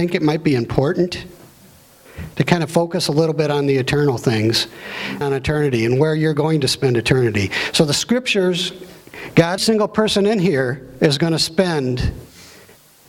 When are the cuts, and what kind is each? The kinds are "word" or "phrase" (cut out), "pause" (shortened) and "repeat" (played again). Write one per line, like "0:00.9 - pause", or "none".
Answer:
0:05.2 - word
0:09.6 - phrase